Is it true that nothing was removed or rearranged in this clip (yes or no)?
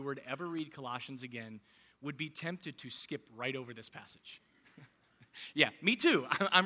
yes